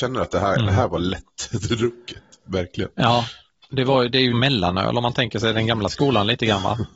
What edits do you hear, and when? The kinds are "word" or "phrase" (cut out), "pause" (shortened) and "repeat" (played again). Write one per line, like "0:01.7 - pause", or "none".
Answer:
0:04.3 - word